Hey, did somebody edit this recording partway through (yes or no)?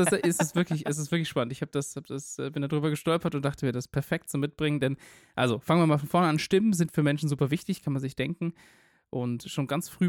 no